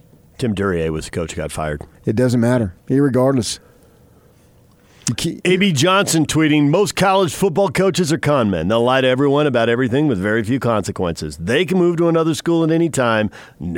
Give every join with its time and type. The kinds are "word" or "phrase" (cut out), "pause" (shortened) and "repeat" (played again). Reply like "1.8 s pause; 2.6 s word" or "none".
1.9 s pause; 2.8 s pause